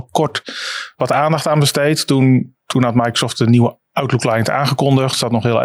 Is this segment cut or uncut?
uncut